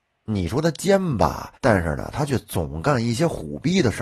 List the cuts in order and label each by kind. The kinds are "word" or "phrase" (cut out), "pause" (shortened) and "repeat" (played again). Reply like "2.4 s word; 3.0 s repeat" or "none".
1.6 s pause